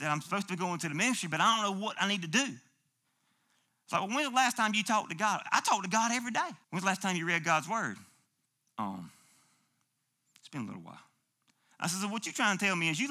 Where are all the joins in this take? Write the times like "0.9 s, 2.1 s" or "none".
6.6 s, 8.4 s